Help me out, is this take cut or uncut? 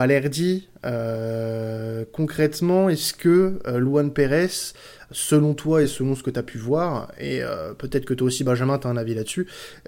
uncut